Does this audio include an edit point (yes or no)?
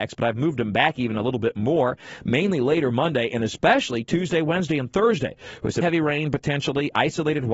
yes